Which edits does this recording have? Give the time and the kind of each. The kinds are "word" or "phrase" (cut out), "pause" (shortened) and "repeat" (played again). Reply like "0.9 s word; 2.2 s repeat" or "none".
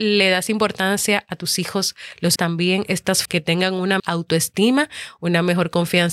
2.4 s word; 3.3 s word; 4.0 s word